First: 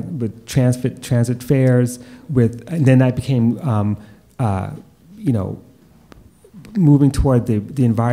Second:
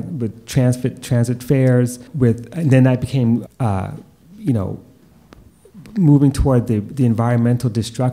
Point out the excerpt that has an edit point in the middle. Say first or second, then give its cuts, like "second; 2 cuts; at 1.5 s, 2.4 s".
second; 2 cuts; at 2.1 s, 3.5 s